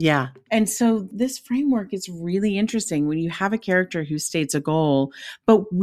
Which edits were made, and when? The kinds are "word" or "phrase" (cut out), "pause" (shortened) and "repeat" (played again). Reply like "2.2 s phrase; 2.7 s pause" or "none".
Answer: none